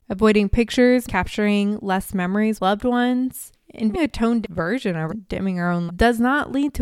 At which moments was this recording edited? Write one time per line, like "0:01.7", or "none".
0:01.1
0:02.6
0:03.9
0:04.4
0:05.1
0:05.9